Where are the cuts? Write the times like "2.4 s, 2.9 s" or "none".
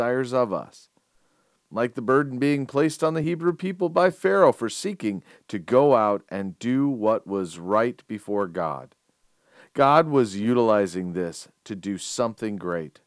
none